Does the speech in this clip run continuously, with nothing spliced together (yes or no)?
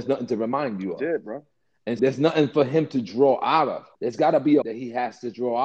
no